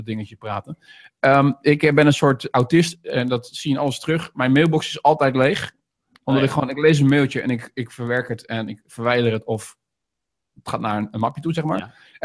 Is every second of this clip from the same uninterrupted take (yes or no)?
yes